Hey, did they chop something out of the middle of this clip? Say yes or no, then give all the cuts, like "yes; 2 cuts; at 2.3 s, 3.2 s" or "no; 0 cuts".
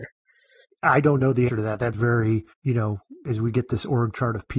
yes; 2 cuts; at 1.5 s, 1.9 s